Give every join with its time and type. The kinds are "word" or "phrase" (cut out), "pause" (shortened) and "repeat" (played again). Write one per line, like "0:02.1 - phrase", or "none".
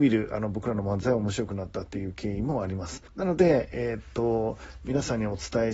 0:03.1 - pause